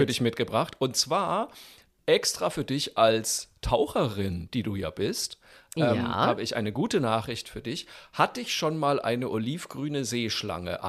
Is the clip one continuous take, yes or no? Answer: yes